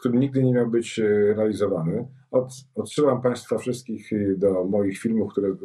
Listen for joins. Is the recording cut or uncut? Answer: uncut